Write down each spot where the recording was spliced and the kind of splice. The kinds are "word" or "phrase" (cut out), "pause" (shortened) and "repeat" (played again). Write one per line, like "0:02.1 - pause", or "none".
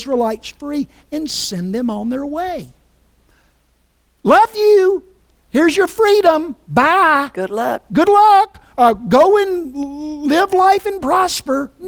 none